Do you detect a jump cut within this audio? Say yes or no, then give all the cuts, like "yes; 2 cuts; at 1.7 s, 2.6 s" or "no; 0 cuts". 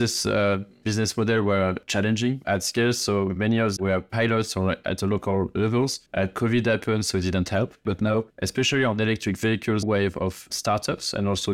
yes; 5 cuts; at 3.8 s, 6.1 s, 8.3 s, 9.8 s, 10.5 s